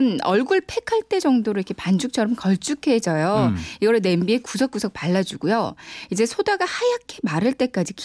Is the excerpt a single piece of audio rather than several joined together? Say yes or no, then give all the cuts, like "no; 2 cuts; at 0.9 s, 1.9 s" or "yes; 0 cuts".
yes; 0 cuts